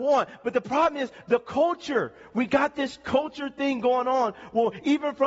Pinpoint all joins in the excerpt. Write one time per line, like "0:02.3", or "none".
none